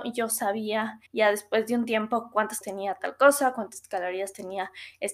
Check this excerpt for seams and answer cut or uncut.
cut